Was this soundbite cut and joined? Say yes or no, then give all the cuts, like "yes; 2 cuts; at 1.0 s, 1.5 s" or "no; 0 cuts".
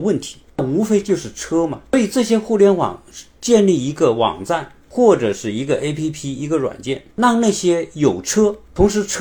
no; 0 cuts